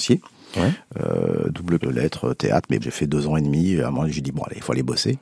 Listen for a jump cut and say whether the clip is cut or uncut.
cut